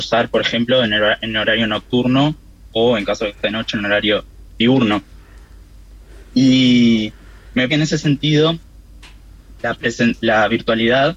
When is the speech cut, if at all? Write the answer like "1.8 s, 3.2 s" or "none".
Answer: 3.4 s, 4.5 s, 7.7 s, 9.6 s